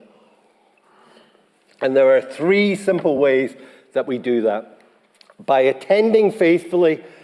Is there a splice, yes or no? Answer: no